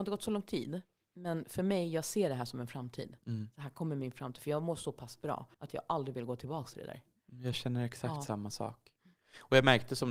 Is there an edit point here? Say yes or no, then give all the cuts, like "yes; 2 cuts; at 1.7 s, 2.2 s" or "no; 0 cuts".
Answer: yes; 1 cut; at 5.5 s